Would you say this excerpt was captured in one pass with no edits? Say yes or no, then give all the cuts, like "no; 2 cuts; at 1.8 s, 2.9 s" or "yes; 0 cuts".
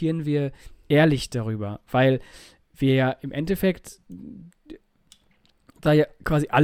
yes; 0 cuts